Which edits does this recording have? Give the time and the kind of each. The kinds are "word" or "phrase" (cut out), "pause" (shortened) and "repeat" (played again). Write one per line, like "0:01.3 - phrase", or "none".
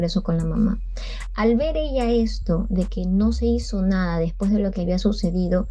none